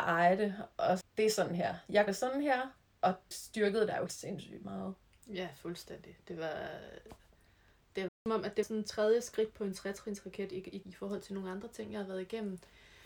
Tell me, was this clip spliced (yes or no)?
yes